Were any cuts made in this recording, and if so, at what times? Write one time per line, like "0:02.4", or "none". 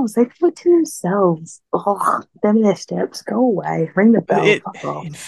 0:01.7
0:02.8